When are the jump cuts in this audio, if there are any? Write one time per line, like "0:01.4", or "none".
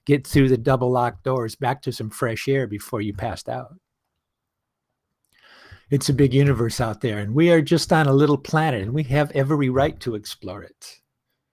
none